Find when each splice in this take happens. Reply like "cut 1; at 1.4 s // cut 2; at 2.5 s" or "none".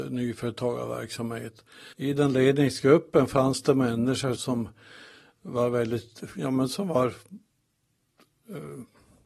cut 1; at 1.9 s // cut 2; at 4.4 s